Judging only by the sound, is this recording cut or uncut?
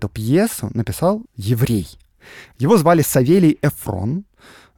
cut